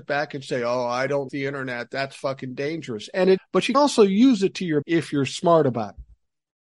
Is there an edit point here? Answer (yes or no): yes